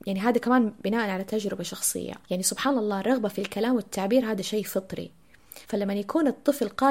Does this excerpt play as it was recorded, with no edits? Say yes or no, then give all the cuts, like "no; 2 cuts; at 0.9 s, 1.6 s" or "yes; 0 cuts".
no; 2 cuts; at 2.2 s, 5.6 s